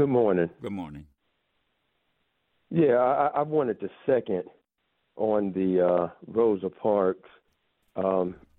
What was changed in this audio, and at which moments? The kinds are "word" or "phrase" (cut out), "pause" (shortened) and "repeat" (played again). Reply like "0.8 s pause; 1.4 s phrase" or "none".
none